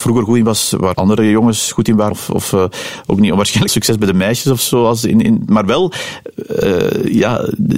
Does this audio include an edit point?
yes; 3 cuts; at 0.9 s, 2.1 s, 3.7 s

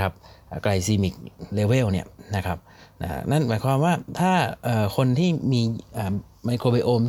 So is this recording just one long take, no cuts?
yes; 0 cuts

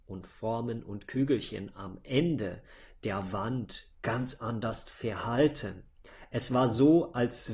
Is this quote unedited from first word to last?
no; 1 cut; at 3.9 s

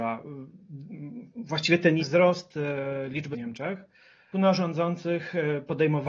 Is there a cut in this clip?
yes; 3 cuts; at 2.0 s, 3.3 s, 4.3 s

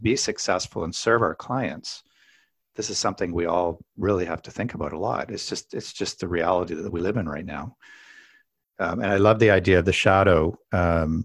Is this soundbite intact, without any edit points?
yes; 0 cuts

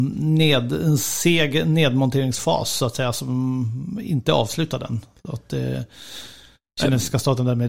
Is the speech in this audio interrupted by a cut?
no; 0 cuts

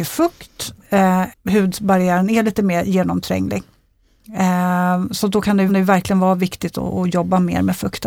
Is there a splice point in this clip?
yes; 2 cuts; at 1.3 s, 5.7 s

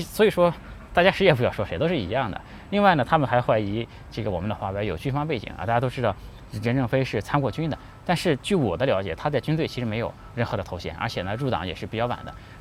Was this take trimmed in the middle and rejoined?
no; 0 cuts

